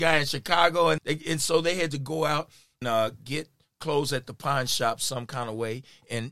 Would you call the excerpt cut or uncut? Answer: cut